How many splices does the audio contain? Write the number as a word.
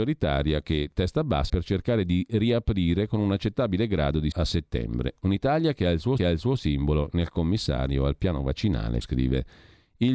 four